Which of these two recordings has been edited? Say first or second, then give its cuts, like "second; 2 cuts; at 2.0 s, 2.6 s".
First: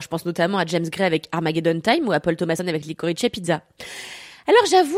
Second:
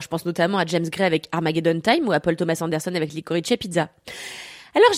first; 1 cut; at 2.6 s